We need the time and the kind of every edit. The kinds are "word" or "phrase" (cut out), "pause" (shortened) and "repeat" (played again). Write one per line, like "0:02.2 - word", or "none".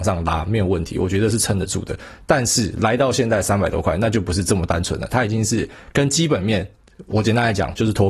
none